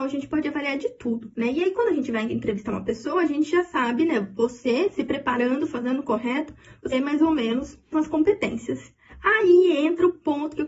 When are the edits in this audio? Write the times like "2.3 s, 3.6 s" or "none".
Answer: 1.3 s, 6.9 s, 7.9 s